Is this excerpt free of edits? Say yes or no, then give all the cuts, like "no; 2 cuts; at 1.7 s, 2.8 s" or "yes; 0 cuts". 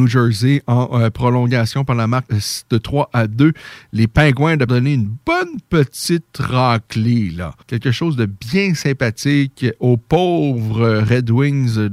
no; 3 cuts; at 2.3 s, 4.7 s, 7.6 s